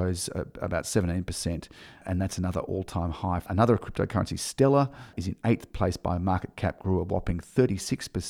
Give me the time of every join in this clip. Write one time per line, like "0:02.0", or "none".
none